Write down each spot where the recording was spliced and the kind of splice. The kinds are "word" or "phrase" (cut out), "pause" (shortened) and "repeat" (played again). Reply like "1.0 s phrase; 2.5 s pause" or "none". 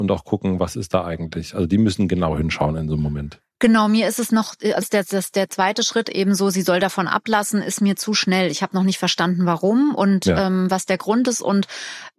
4.8 s word